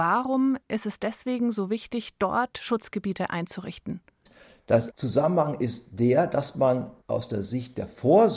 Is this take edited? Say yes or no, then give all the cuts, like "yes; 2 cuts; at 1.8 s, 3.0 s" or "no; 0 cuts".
no; 0 cuts